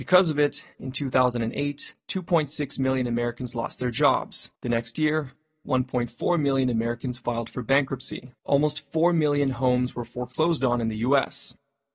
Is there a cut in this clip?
yes; 3 cuts; at 2.0 s, 4.6 s, 8.4 s

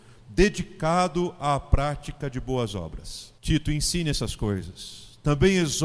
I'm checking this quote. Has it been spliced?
yes; 1 cut; at 3.4 s

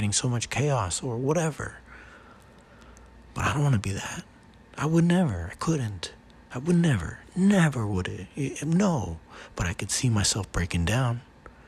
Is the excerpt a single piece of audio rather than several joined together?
yes; 0 cuts

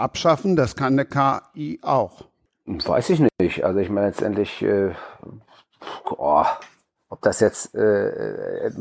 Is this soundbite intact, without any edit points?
yes; 0 cuts

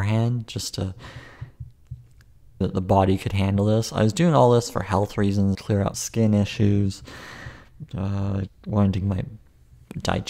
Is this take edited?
yes; 5 cuts; at 2.6 s, 5.5 s, 5.9 s, 8.5 s, 9.0 s

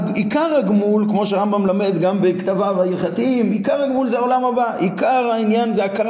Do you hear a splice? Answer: no; 0 cuts

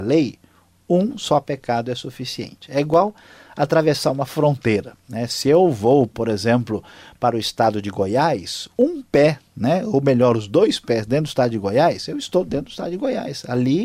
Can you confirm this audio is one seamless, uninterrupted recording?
yes; 0 cuts

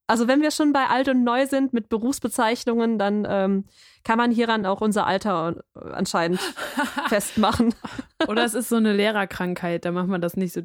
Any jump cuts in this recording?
no; 0 cuts

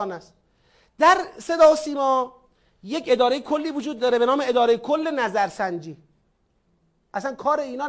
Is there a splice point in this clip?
no; 0 cuts

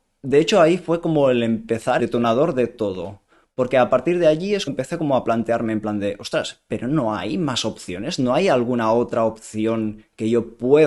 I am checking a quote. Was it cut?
yes; 2 cuts; at 2.0 s, 4.7 s

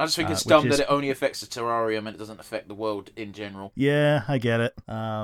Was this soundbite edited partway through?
no; 0 cuts

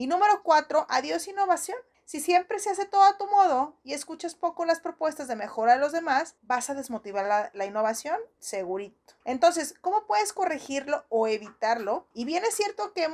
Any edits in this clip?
yes; 4 cuts; at 1.9 s, 6.4 s, 9.2 s, 12.1 s

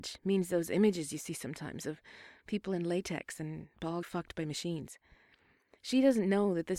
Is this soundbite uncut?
no; 1 cut; at 4.0 s

